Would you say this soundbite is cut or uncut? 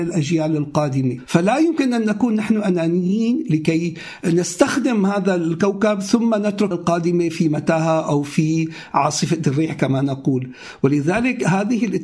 cut